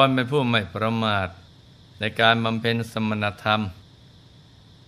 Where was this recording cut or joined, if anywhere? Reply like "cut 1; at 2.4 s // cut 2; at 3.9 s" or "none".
none